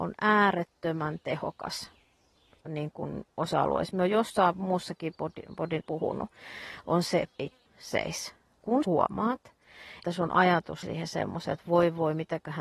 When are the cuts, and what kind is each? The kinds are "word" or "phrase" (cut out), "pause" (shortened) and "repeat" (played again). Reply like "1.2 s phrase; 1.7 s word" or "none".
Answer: 2.6 s word; 3.9 s word; 5.8 s word; 7.4 s word; 7.7 s word; 8.8 s word; 10.0 s word; 10.8 s word